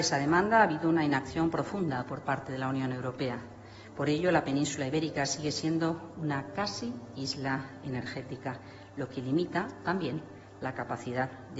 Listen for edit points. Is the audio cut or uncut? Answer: uncut